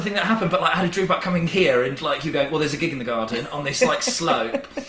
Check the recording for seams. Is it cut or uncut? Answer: uncut